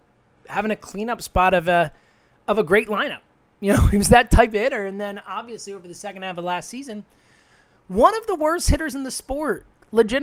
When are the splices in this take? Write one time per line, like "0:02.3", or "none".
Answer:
none